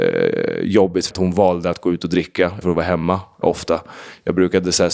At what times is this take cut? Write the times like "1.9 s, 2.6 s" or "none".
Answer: 1.1 s, 2.6 s, 3.4 s